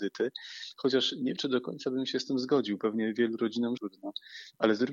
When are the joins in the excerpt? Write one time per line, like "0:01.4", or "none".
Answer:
0:01.4
0:03.8